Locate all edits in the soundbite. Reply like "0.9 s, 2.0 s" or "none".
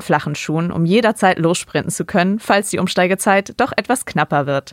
none